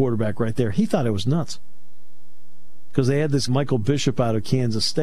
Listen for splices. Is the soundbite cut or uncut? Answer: cut